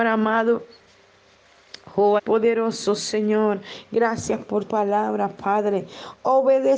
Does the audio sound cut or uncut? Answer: cut